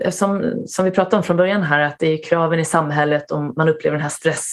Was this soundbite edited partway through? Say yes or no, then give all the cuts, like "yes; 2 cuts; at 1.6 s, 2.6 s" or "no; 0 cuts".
no; 0 cuts